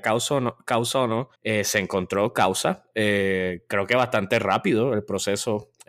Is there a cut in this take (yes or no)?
yes